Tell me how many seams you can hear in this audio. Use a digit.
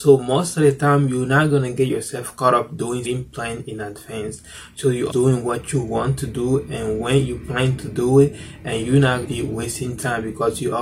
3